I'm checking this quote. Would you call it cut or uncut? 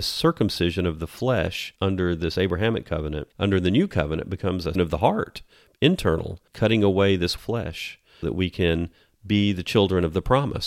cut